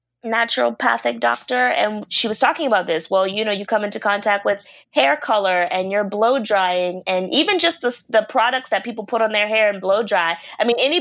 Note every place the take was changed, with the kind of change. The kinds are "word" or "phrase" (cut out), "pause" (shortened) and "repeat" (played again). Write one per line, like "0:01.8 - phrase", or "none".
none